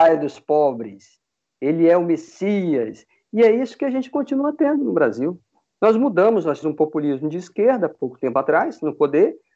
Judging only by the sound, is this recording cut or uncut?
cut